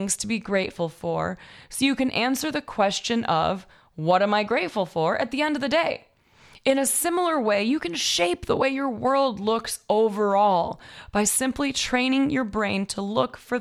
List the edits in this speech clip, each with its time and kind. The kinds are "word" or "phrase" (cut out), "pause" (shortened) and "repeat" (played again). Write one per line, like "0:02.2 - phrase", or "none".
none